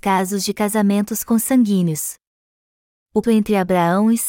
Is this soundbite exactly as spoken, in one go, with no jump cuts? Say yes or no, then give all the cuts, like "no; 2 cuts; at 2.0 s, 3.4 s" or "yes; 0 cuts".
no; 1 cut; at 3.2 s